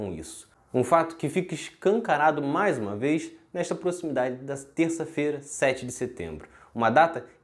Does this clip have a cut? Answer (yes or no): no